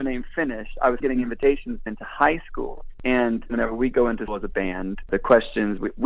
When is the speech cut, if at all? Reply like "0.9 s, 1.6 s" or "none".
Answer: 1.0 s, 1.9 s, 3.5 s, 4.3 s